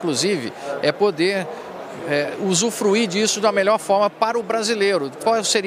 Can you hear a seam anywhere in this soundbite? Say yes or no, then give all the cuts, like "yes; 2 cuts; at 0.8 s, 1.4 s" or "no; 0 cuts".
no; 0 cuts